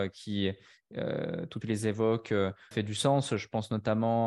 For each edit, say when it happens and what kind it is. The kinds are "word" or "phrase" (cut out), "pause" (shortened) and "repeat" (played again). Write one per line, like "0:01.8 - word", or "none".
0:01.6 - phrase
0:02.7 - word

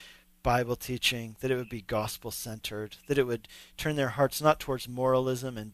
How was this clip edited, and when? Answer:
none

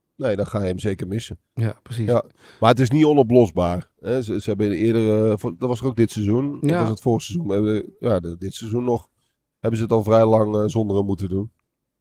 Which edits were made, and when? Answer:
none

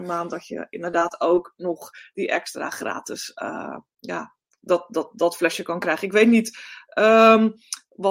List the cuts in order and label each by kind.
none

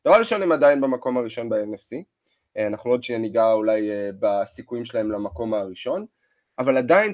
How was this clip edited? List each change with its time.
none

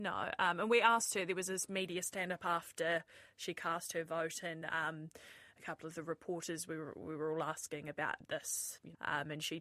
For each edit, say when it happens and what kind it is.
none

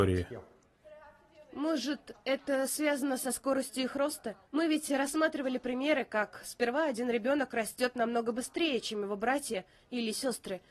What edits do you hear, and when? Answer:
0:04.4 - pause

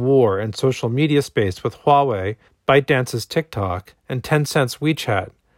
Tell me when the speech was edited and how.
0:02.5 - pause
0:04.0 - pause

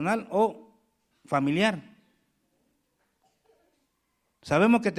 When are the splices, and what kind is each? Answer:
none

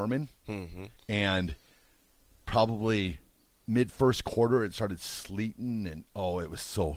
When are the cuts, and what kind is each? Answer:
0:01.0 - pause
0:03.3 - pause

